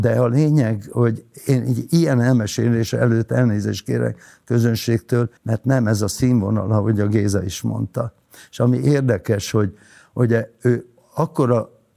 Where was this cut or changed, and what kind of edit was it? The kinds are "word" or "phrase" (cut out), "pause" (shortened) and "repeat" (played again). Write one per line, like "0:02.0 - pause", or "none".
0:05.4 - pause